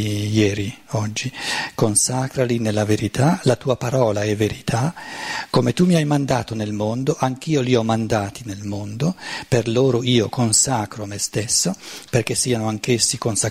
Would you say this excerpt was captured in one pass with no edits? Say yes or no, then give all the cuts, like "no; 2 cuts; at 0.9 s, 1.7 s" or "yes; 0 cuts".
yes; 0 cuts